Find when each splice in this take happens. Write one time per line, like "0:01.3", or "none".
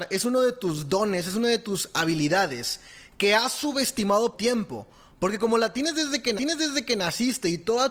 0:04.3
0:06.4